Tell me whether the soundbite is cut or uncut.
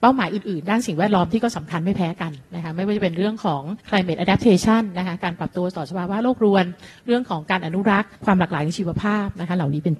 cut